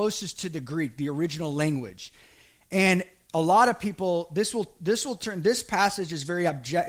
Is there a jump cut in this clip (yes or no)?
no